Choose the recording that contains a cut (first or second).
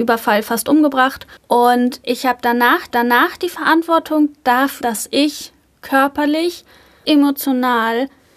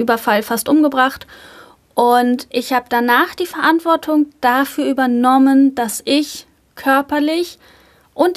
first